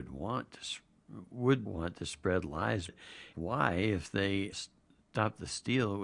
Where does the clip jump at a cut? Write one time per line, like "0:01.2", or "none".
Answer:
0:01.7
0:02.9
0:03.3
0:04.5